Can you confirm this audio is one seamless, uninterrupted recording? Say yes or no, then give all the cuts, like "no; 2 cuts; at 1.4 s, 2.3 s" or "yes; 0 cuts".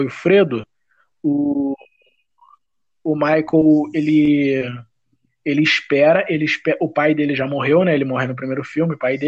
yes; 0 cuts